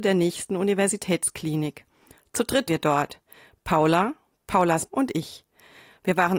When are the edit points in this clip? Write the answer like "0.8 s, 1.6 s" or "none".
2.7 s, 4.9 s